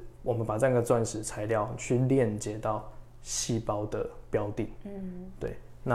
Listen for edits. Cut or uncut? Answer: uncut